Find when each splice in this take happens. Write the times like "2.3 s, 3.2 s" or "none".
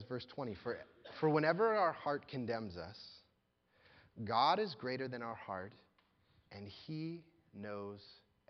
none